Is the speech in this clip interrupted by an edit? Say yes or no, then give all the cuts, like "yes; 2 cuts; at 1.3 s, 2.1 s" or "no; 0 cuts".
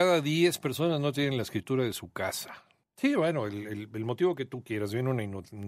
no; 0 cuts